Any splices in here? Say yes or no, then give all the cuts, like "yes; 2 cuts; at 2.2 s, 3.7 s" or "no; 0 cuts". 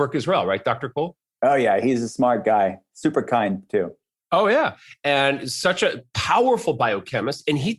no; 0 cuts